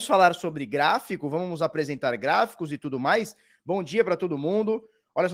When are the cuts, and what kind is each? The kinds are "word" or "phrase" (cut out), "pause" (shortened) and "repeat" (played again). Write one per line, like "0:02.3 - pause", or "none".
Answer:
none